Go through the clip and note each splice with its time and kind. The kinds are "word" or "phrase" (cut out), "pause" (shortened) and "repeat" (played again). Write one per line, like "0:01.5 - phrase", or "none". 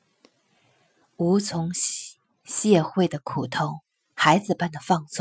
none